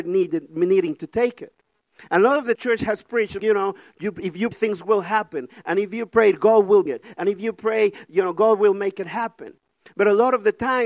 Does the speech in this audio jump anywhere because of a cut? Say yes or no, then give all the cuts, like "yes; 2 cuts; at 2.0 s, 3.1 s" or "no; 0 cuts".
yes; 4 cuts; at 2.6 s, 3.4 s, 4.5 s, 6.9 s